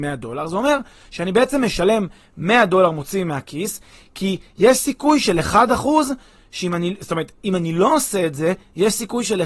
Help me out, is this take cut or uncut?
uncut